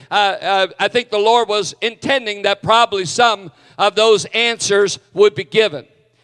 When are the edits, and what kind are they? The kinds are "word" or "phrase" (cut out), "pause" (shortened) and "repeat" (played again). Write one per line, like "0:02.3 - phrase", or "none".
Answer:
none